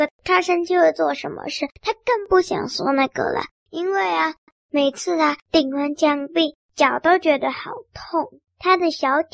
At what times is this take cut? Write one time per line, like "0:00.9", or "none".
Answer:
0:01.7
0:04.5